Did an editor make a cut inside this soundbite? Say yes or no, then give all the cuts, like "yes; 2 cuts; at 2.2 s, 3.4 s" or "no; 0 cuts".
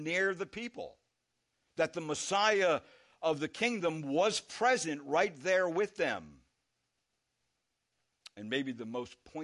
no; 0 cuts